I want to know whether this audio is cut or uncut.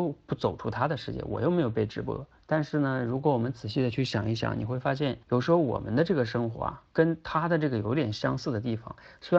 cut